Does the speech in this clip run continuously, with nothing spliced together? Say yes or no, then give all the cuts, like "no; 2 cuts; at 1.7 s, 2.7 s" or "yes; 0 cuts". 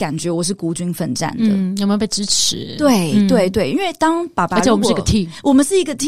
yes; 0 cuts